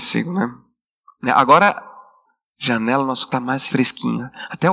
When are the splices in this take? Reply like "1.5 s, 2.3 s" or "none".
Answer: 3.3 s, 3.7 s